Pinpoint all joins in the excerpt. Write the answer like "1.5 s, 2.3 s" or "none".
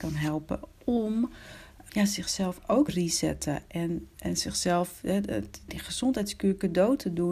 1.9 s, 2.9 s, 4.1 s, 5.7 s